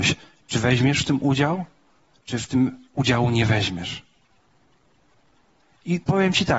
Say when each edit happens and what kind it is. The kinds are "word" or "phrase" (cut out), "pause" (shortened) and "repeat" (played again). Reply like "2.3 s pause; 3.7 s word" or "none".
none